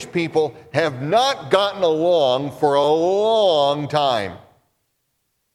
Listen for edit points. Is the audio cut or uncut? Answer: uncut